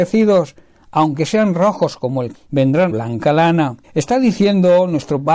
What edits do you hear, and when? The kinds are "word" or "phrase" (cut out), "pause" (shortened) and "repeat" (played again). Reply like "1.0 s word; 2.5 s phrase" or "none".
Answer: 2.3 s word; 2.9 s phrase; 3.8 s pause

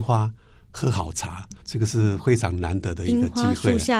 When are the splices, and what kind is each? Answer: 1.6 s pause

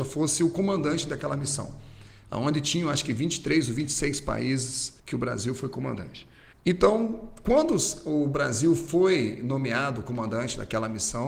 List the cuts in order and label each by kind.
5.0 s pause; 6.5 s pause

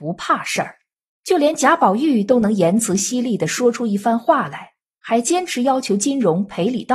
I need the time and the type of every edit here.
none

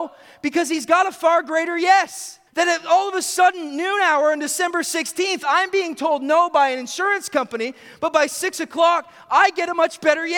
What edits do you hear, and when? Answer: 2.5 s pause

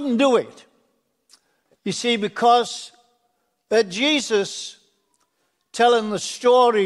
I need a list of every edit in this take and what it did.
none

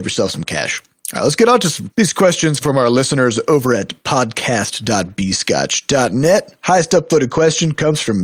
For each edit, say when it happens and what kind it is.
1.9 s word; 2.6 s word

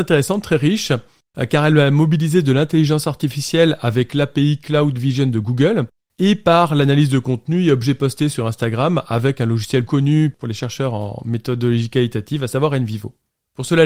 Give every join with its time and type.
9.9 s word

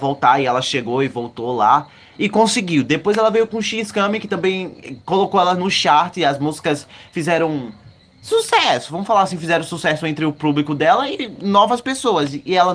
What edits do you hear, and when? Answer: none

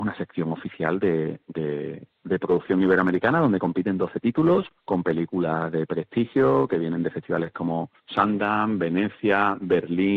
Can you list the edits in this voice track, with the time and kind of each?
4.8 s pause; 8.0 s pause

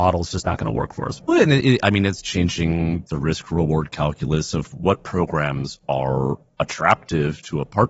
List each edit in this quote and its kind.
none

